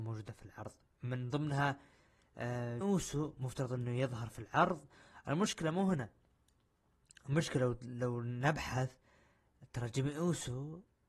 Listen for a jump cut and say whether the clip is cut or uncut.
cut